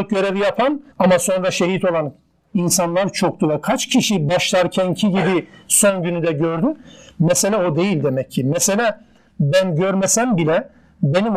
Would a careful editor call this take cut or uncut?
cut